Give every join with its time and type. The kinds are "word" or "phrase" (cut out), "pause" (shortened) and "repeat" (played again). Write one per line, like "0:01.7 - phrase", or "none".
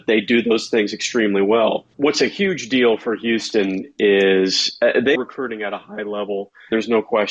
0:05.1 - word